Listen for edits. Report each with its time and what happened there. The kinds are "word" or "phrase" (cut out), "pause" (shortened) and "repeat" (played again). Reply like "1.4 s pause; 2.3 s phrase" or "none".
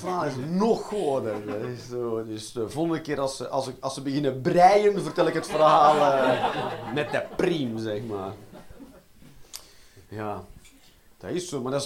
10.0 s pause